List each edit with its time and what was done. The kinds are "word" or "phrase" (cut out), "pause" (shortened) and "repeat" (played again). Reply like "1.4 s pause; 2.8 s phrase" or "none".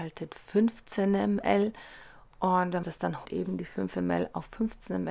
2.8 s word; 3.2 s word